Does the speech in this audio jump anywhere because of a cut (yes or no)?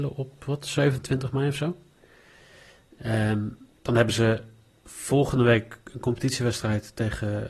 no